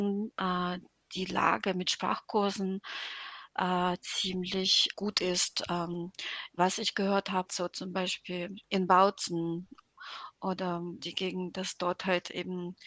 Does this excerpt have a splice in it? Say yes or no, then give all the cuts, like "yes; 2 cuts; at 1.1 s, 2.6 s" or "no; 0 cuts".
yes; 4 cuts; at 4.9 s, 7.5 s, 8.6 s, 11.0 s